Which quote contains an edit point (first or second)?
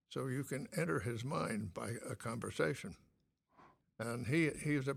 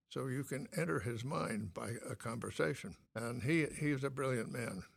second